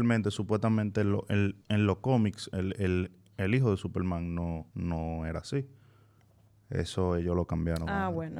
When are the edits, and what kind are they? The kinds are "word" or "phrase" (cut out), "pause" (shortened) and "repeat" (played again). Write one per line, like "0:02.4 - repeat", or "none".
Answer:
0:01.6 - pause
0:04.7 - pause